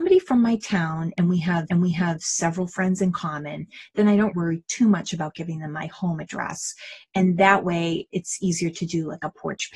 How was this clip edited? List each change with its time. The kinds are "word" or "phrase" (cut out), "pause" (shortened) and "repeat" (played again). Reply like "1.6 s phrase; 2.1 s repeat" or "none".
1.7 s repeat; 4.3 s word